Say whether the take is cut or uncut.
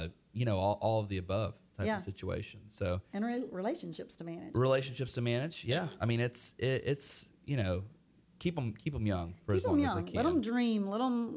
uncut